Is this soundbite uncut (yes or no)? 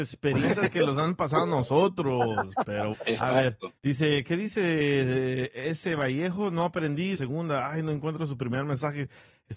no